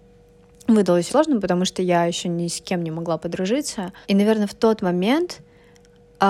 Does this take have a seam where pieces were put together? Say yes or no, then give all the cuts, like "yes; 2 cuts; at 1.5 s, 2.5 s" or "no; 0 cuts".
yes; 2 cuts; at 1.1 s, 4.0 s